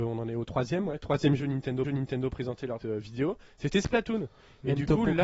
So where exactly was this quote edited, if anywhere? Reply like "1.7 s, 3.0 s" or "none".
1.8 s, 2.8 s